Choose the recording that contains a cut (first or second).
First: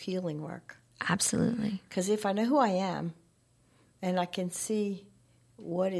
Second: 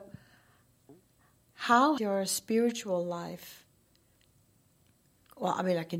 second